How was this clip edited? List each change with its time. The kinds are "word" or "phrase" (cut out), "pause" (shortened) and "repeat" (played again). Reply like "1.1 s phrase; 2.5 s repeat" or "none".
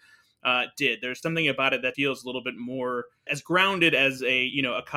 1.2 s word; 1.9 s word; 3.3 s word